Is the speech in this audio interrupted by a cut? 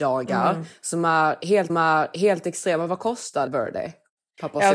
yes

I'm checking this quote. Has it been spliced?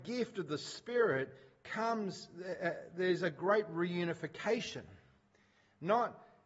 no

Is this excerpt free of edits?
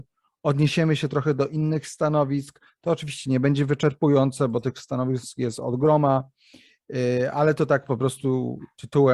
yes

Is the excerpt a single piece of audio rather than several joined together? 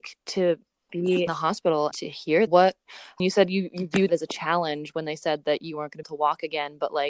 no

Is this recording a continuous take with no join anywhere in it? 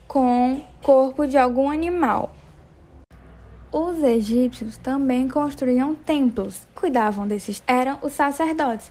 no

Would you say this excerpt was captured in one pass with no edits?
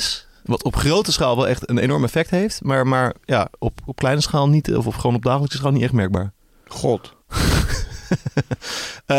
no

